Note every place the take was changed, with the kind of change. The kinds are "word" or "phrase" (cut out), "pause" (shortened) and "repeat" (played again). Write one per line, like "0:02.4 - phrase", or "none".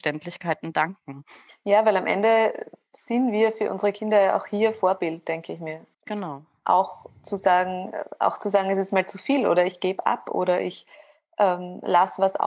0:01.5 - pause
0:05.9 - pause